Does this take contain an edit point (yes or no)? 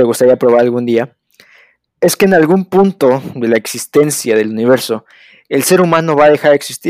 no